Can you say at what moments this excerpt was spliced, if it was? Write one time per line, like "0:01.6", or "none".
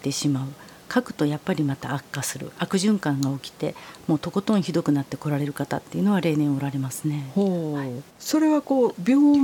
0:08.1